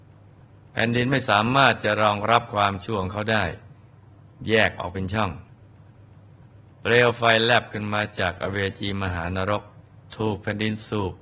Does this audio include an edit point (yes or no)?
yes